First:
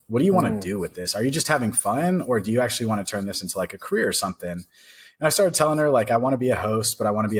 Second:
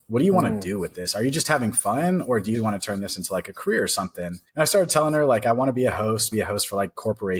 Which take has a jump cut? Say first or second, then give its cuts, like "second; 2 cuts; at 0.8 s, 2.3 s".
second; 3 cuts; at 2.5 s, 4.5 s, 6.3 s